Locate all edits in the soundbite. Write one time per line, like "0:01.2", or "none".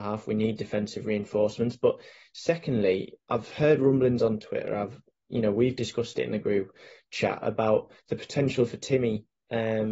0:03.2
0:08.0